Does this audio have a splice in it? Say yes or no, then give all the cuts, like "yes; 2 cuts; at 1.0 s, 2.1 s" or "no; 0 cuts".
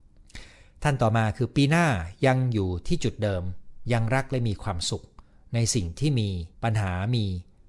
yes; 1 cut; at 6.5 s